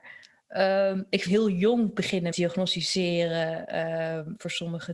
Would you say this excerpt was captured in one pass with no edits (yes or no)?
no